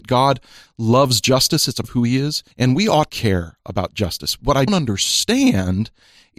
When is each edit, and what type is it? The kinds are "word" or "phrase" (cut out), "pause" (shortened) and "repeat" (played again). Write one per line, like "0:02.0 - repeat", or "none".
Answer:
0:01.8 - word
0:02.5 - pause
0:03.1 - word
0:04.7 - word